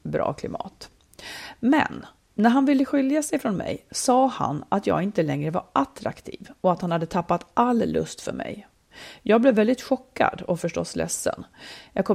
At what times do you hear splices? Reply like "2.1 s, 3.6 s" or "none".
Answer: none